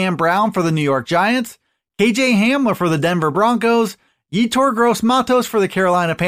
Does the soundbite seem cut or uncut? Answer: uncut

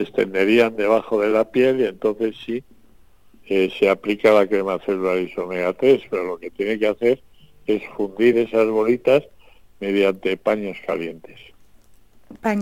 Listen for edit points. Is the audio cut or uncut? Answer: uncut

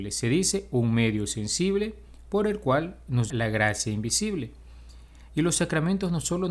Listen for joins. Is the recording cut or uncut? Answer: cut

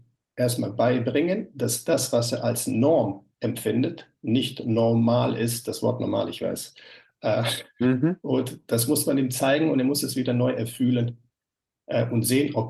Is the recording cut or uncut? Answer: uncut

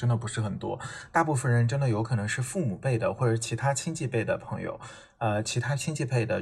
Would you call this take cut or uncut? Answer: uncut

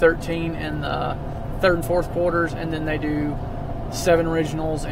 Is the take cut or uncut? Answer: uncut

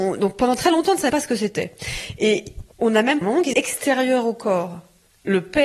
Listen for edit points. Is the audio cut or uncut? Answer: cut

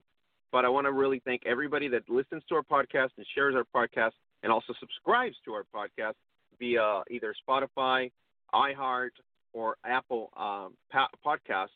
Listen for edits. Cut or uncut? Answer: uncut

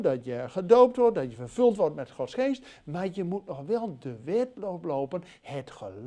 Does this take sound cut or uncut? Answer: uncut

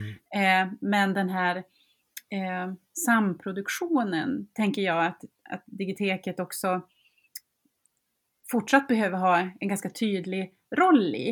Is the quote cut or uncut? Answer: uncut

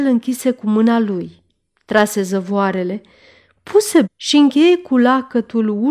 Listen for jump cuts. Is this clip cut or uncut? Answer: cut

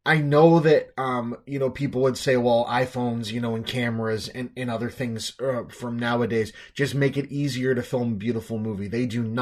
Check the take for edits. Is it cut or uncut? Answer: uncut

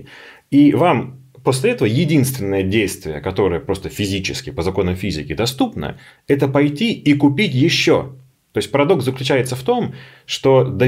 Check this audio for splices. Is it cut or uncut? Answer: uncut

